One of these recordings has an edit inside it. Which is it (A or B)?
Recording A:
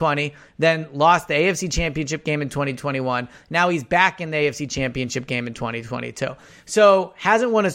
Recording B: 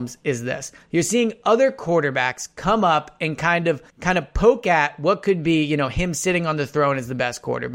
B